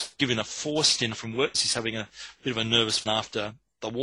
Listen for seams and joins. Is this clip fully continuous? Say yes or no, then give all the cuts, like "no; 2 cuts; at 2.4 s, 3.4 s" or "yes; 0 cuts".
no; 3 cuts; at 1.1 s, 1.5 s, 3.1 s